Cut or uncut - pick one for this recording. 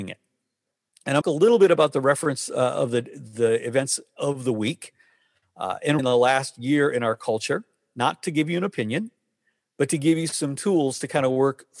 cut